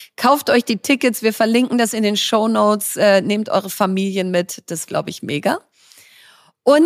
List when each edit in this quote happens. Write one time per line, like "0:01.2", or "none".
0:04.9